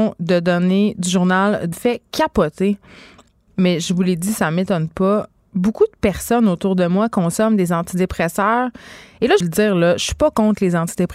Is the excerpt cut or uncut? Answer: cut